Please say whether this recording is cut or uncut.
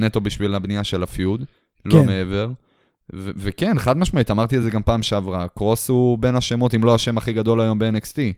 uncut